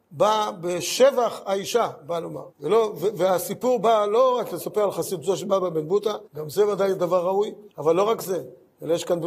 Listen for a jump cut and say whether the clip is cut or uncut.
cut